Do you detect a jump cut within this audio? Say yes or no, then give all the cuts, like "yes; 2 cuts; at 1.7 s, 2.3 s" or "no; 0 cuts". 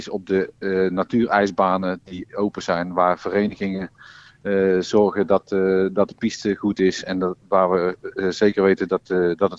no; 0 cuts